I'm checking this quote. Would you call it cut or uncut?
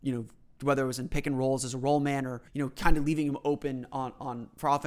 cut